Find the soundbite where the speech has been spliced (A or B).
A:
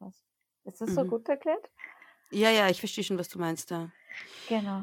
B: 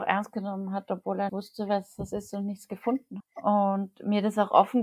B